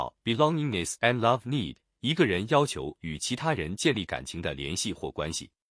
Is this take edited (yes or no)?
no